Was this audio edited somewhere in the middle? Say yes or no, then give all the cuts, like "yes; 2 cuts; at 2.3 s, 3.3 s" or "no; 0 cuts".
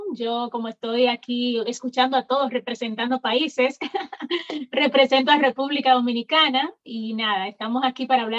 no; 0 cuts